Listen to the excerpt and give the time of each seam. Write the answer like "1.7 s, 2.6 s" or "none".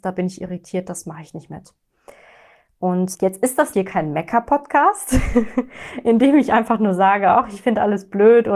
3.1 s, 3.7 s